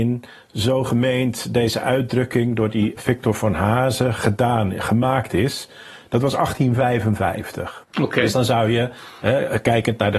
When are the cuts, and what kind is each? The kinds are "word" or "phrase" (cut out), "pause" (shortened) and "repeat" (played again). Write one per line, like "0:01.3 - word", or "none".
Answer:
0:03.0 - word
0:07.8 - pause